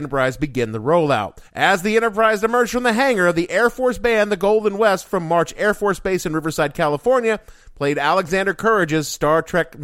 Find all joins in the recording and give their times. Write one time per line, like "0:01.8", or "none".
0:01.5